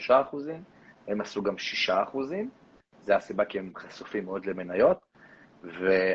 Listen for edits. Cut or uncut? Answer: uncut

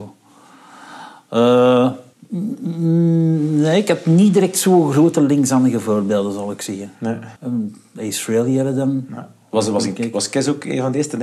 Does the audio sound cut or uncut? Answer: cut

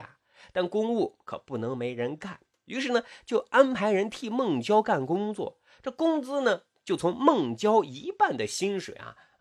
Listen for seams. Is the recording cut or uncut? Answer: uncut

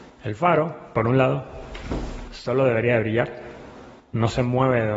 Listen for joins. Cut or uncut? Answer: uncut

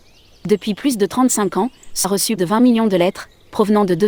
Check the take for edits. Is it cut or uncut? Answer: cut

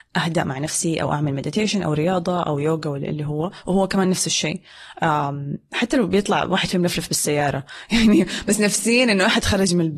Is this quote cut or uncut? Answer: uncut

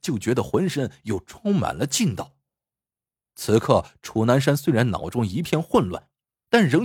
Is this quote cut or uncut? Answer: uncut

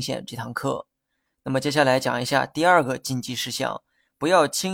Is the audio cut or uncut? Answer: uncut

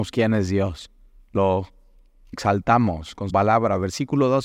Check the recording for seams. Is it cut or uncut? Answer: cut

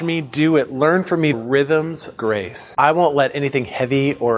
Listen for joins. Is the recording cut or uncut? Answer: cut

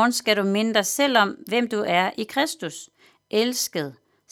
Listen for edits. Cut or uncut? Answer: uncut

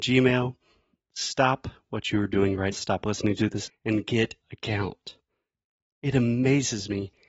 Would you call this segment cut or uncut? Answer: cut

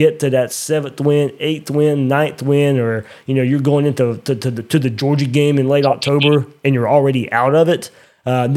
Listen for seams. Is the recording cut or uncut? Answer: uncut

